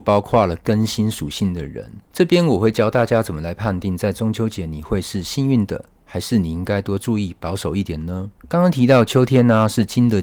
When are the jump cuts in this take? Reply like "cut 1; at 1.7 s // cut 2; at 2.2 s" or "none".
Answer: cut 1; at 2.1 s // cut 2; at 8.4 s